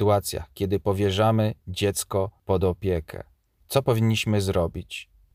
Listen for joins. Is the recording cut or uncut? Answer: uncut